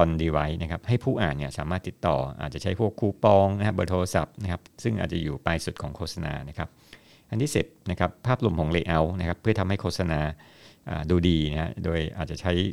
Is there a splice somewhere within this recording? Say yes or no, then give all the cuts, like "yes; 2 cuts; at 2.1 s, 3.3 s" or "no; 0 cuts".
no; 0 cuts